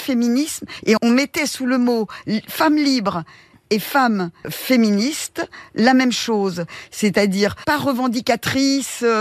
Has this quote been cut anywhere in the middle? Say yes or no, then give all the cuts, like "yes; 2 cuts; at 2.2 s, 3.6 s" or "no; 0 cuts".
yes; 1 cut; at 1.0 s